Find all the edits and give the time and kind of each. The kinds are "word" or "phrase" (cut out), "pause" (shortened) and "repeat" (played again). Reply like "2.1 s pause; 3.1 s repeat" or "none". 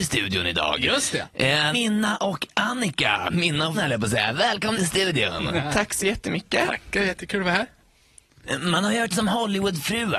1.7 s word; 3.7 s word; 4.7 s word; 9.1 s word